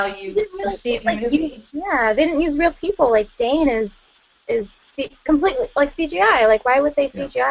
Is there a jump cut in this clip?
yes; 1 cut; at 1.7 s

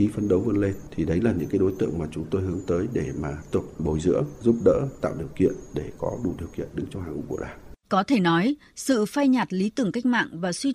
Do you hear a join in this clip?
yes; 2 cuts; at 3.5 s, 7.8 s

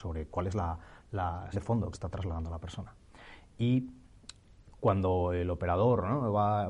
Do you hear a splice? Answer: yes; 2 cuts; at 1.5 s, 1.9 s

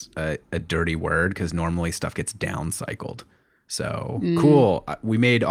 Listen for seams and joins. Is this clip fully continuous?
yes; 0 cuts

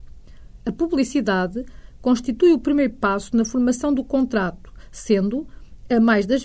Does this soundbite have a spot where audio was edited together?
no; 0 cuts

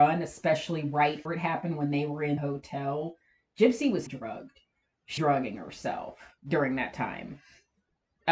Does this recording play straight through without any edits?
no; 5 cuts; at 1.2 s, 2.4 s, 4.1 s, 5.2 s, 6.4 s

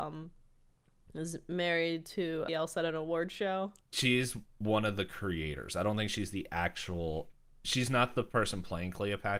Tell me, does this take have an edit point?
yes; 2 cuts; at 2.5 s, 3.8 s

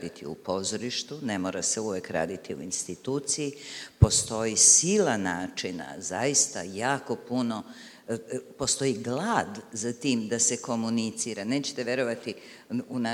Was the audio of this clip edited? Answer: no; 0 cuts

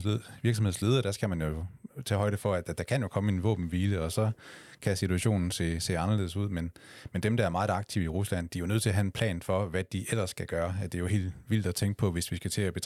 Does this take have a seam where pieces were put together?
no; 0 cuts

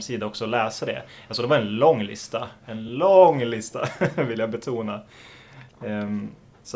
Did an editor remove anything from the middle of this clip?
no; 0 cuts

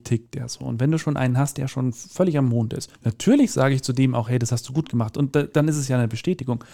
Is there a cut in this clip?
yes; 1 cut; at 3.0 s

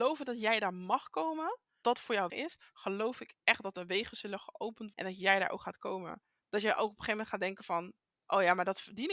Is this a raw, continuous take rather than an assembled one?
no; 3 cuts; at 1.8 s, 2.3 s, 4.9 s

